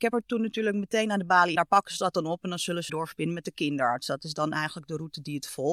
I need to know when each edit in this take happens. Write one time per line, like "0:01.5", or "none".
0:01.6
0:02.9